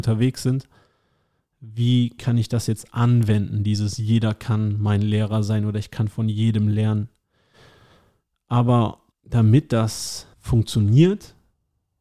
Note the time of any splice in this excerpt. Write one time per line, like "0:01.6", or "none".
0:09.1
0:10.3